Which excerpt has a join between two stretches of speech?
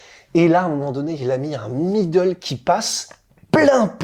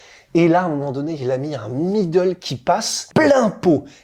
second; 1 cut; at 3.1 s

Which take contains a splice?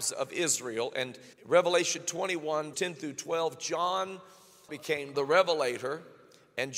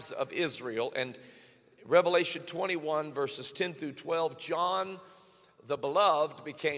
first; 4 cuts; at 1.3 s, 2.7 s, 4.7 s, 5.1 s

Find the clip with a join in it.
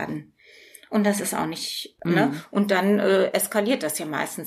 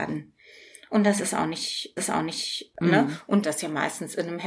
second; 2 cuts; at 2.0 s, 3.4 s

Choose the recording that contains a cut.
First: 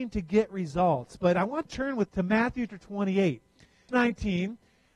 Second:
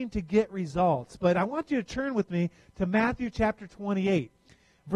first; 4 cuts; at 1.7 s, 2.1 s, 2.7 s, 3.9 s

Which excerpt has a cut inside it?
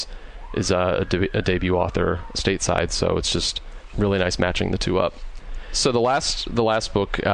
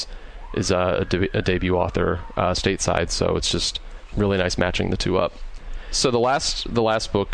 first; 1 cut; at 2.3 s

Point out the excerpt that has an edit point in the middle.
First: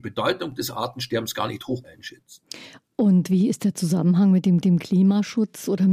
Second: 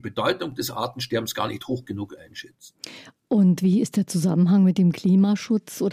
first; 2 cuts; at 1.8 s, 4.6 s

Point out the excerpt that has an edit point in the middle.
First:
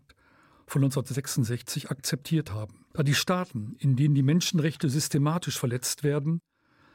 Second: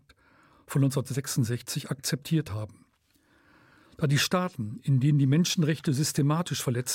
first; 1 cut; at 2.9 s

